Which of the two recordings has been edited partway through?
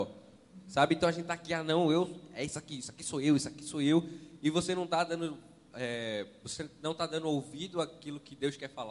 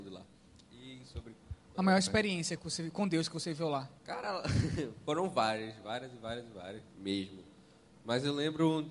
second; 2 cuts; at 4.0 s, 6.9 s

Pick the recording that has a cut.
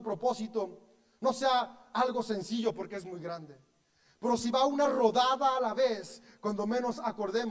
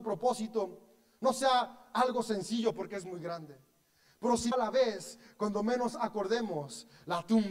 second; 1 cut; at 4.5 s

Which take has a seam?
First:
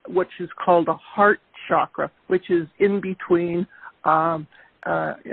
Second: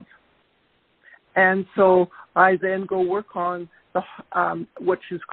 first; 1 cut; at 2.2 s

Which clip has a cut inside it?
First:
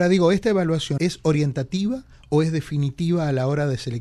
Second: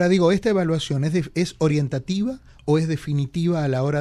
first; 1 cut; at 1.0 s

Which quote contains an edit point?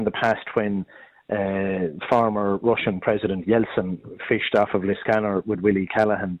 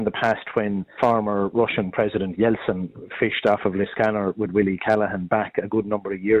second; 1 cut; at 1.0 s

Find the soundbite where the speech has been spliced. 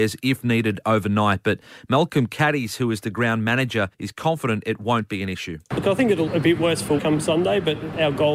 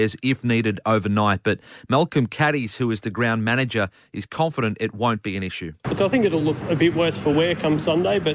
first; 3 cuts; at 3.9 s, 6.3 s, 7.0 s

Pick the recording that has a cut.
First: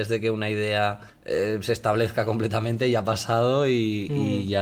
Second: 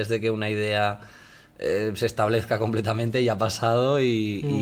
first; 1 cut; at 1.1 s

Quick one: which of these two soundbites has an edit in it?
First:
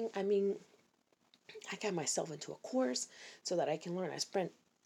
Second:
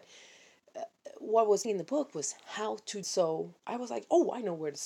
second; 2 cuts; at 1.6 s, 3.0 s

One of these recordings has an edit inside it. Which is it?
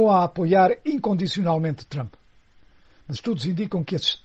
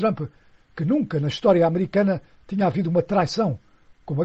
first; 1 cut; at 3.2 s

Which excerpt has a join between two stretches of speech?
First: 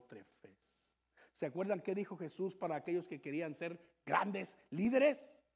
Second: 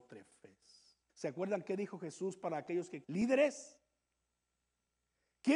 second; 2 cuts; at 1.1 s, 3.0 s

